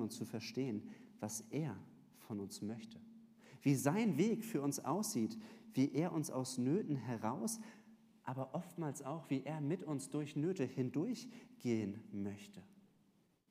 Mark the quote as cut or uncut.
uncut